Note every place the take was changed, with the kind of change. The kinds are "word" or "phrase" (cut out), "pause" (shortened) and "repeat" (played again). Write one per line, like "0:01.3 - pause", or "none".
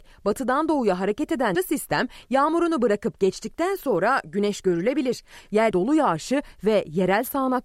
0:01.5 - word
0:05.7 - word